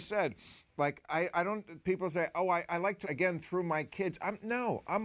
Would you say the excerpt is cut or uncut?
cut